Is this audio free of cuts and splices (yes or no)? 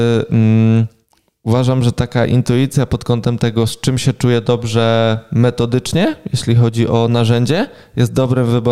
yes